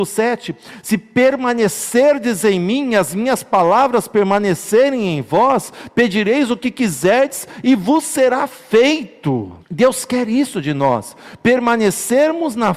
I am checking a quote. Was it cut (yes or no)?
yes